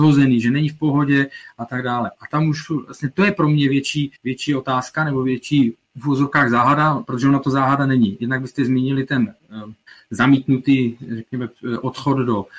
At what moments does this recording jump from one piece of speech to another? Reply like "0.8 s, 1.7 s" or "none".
4.1 s, 9.9 s